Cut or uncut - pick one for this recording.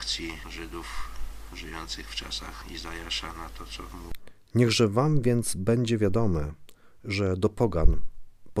uncut